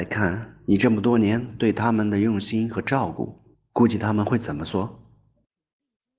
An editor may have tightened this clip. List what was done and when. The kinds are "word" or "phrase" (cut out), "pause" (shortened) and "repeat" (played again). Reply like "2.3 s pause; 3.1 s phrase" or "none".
3.5 s pause